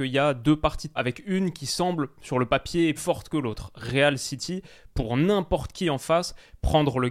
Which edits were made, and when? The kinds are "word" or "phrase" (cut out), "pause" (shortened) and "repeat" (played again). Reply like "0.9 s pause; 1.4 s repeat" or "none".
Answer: 1.0 s word; 3.0 s word